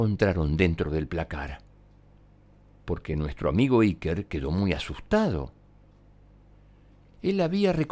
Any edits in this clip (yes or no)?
no